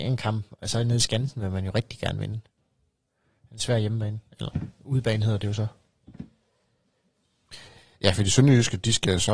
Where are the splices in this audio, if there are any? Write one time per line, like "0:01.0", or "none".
none